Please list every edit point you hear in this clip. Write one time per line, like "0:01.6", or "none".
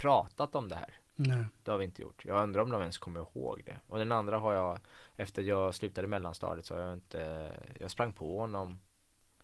0:01.1